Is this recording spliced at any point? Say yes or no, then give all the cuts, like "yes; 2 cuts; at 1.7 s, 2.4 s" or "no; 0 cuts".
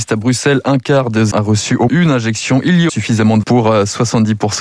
yes; 4 cuts; at 1.3 s, 1.9 s, 2.9 s, 3.4 s